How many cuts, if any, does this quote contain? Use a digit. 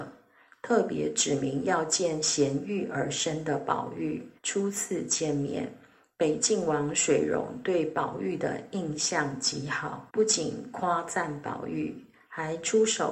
2